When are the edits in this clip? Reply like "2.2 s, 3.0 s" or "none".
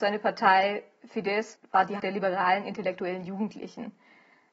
1.6 s, 2.0 s